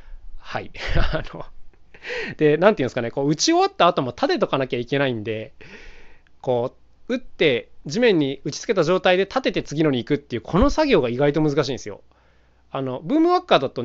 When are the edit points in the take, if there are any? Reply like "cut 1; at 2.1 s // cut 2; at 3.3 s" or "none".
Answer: none